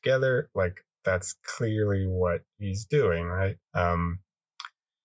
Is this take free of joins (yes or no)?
no